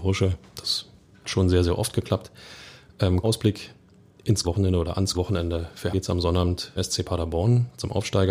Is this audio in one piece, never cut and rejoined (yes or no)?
no